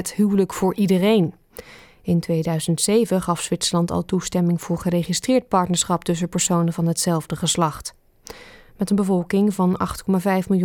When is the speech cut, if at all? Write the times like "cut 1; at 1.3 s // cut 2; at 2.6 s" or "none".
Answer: none